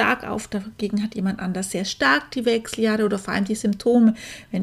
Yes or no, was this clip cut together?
no